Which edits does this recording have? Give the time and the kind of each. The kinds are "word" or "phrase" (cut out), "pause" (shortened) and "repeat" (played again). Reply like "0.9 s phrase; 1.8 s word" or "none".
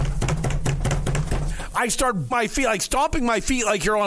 2.3 s word